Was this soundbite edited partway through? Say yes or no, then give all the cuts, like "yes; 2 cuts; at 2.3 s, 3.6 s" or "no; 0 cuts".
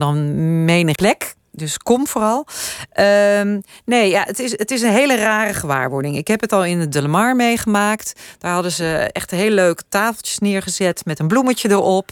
yes; 1 cut; at 0.9 s